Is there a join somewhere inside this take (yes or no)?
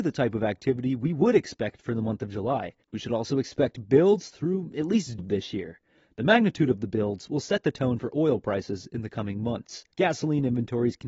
yes